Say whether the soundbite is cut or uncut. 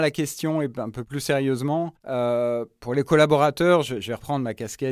cut